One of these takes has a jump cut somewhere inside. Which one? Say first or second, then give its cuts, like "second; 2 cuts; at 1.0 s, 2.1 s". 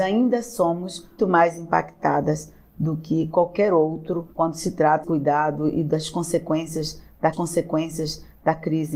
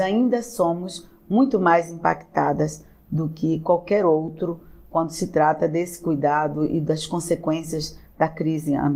first; 4 cuts; at 1.2 s, 4.3 s, 5.0 s, 7.3 s